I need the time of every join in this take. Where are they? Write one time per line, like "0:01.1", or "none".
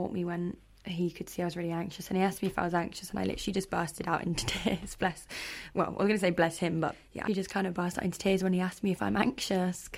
0:07.3